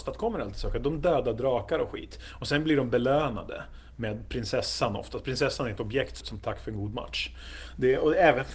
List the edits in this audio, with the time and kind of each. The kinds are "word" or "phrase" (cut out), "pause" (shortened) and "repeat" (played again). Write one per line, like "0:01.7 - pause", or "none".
0:06.2 - phrase